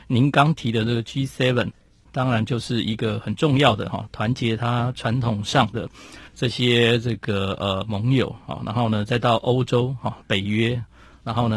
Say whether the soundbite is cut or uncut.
cut